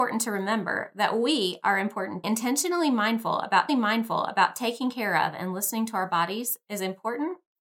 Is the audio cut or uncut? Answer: cut